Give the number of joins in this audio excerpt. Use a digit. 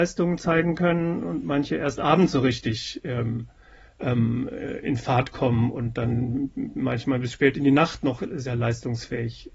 0